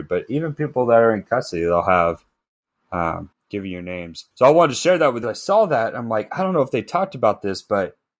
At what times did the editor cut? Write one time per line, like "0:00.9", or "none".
0:03.3
0:04.3
0:05.2